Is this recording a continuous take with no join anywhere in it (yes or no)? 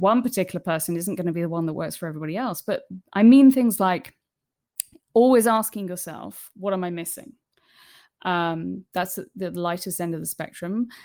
no